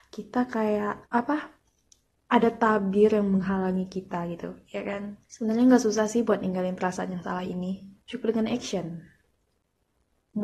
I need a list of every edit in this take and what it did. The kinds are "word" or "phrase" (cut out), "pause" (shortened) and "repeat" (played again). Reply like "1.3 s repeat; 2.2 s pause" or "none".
1.1 s pause; 5.2 s pause; 8.0 s pause

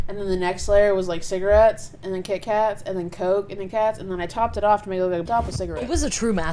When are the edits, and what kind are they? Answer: 3.7 s word; 5.3 s phrase

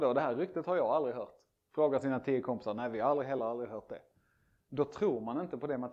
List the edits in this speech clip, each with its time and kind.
none

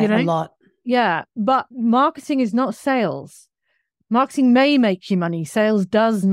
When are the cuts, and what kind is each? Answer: none

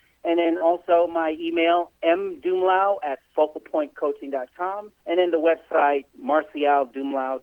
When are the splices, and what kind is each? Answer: 5.0 s pause; 6.1 s pause

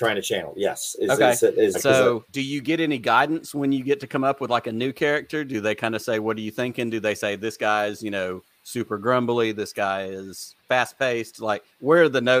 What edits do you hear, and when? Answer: 1.7 s word; 2.3 s pause; 10.6 s pause

